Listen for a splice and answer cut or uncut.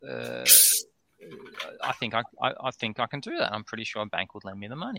uncut